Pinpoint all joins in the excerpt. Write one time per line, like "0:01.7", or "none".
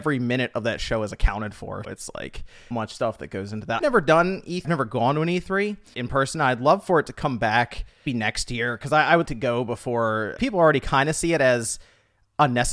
0:01.8
0:02.7
0:03.8
0:04.6
0:05.9
0:08.1
0:09.3
0:10.4